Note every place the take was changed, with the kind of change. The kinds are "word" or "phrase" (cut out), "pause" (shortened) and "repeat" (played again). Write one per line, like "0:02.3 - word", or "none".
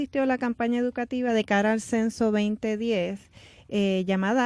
none